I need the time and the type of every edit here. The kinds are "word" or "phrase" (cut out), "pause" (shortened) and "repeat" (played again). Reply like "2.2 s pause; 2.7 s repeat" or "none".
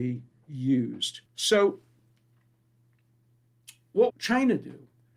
1.3 s pause; 4.1 s word